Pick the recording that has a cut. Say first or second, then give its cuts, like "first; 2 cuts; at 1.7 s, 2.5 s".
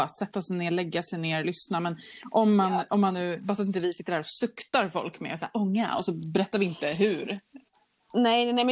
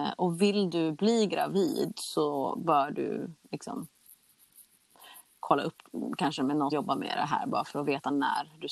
second; 1 cut; at 6.7 s